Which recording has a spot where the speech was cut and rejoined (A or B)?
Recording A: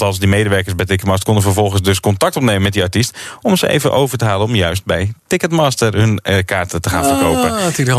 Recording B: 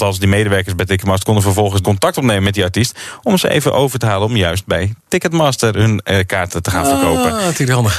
B